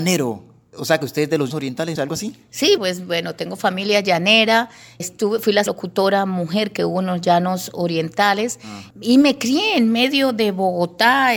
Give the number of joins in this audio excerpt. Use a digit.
5